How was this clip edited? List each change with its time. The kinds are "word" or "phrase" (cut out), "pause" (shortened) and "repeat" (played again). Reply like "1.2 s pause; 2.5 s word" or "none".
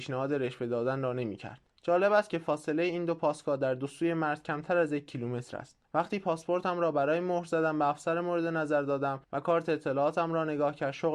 1.7 s pause; 5.8 s pause; 9.2 s pause